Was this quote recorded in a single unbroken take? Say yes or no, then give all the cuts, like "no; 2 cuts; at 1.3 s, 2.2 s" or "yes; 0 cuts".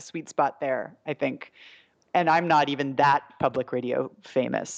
yes; 0 cuts